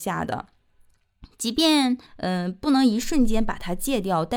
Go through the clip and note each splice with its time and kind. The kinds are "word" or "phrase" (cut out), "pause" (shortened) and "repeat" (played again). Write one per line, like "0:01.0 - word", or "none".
0:02.1 - pause